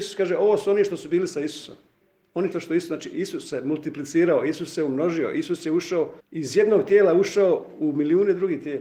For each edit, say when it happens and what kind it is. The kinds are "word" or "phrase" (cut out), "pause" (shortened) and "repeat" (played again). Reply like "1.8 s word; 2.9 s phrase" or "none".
2.5 s phrase; 6.2 s pause